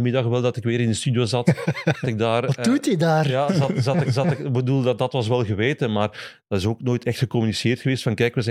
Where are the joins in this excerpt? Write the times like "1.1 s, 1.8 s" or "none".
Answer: 2.0 s, 3.5 s, 4.0 s